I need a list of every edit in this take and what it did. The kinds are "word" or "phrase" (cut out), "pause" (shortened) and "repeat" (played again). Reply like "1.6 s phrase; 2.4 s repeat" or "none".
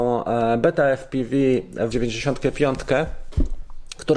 1.9 s phrase